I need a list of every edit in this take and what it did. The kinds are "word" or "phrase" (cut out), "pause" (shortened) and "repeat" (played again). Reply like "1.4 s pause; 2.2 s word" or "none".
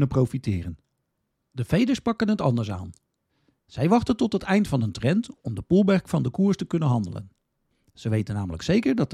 none